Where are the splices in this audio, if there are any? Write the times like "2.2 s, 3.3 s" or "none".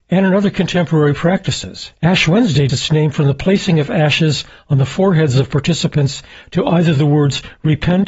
2.0 s, 2.7 s